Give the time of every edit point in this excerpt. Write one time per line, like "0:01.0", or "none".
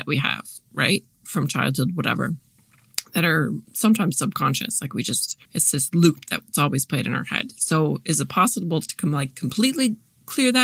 0:03.6
0:05.4

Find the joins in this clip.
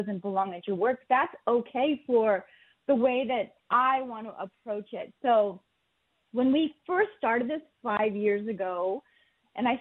0:03.6

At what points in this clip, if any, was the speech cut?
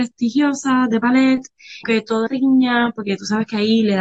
0:01.8
0:02.3

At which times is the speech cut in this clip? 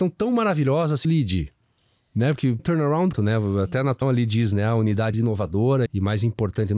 0:01.0
0:02.6
0:03.1
0:04.0
0:05.1
0:05.9

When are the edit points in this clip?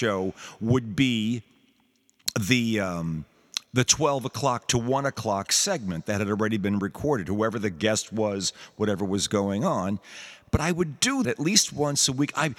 0:11.2

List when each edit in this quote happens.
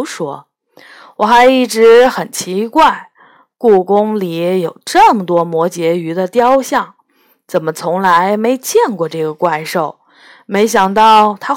none

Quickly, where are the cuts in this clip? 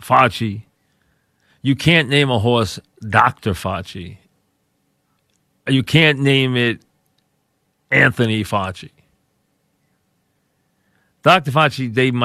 none

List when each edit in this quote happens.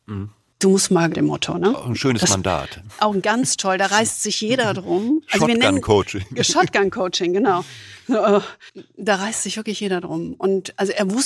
0:01.1
0:03.2

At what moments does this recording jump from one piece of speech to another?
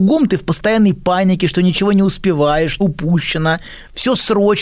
0:02.8

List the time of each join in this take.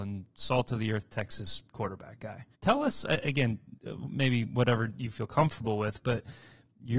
0:02.5

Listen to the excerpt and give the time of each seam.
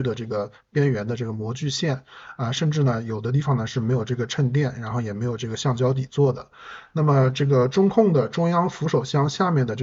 none

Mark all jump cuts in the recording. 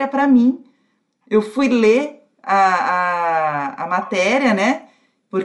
none

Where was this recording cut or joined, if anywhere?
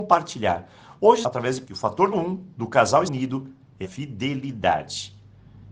0:01.2
0:01.6
0:02.1
0:03.1
0:03.8

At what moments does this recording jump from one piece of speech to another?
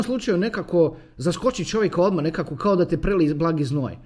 none

